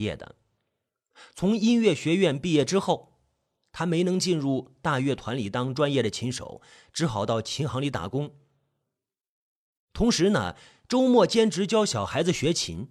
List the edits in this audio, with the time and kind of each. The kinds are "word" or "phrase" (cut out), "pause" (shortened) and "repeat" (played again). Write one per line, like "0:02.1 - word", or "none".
none